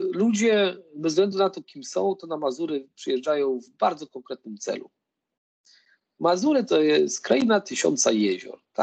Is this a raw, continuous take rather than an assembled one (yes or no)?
yes